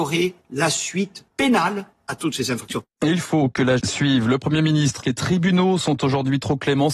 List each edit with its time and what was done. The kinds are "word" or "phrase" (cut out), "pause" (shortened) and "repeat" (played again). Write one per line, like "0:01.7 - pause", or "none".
0:03.8 - word
0:05.0 - phrase